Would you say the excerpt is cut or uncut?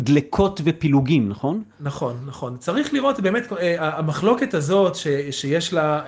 uncut